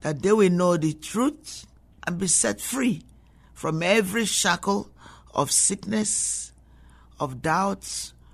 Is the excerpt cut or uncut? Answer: uncut